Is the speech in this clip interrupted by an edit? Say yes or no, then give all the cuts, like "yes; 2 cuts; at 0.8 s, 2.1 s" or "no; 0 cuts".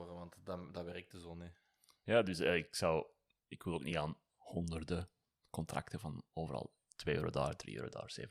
no; 0 cuts